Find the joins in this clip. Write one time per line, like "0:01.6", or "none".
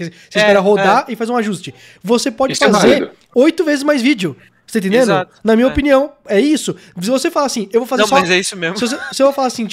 none